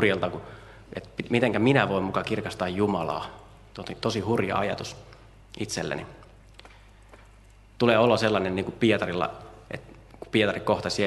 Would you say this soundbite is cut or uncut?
uncut